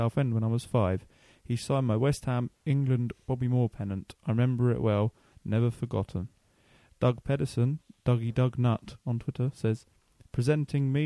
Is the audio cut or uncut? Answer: uncut